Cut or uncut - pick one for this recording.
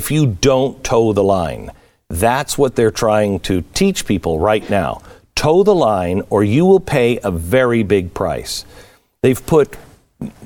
uncut